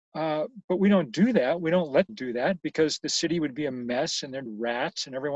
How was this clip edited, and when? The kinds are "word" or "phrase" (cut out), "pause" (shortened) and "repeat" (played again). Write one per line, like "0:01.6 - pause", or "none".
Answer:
0:02.1 - word
0:02.6 - pause
0:04.5 - word

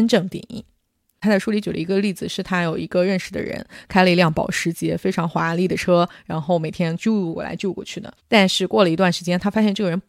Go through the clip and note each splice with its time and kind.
0:08.2 - pause

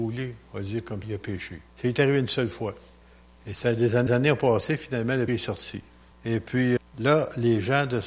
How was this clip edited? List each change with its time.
0:01.0 - word
0:01.7 - pause
0:03.0 - pause
0:04.1 - repeat
0:05.3 - word
0:06.1 - pause
0:06.8 - word

